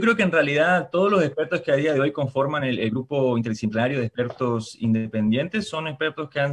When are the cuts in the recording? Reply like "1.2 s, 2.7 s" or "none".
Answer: none